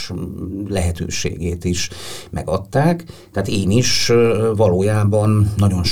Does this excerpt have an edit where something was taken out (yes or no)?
no